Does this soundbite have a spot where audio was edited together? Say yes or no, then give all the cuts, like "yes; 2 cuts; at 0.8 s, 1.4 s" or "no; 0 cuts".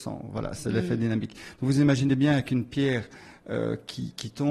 no; 0 cuts